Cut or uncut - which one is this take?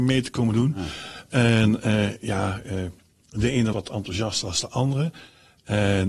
cut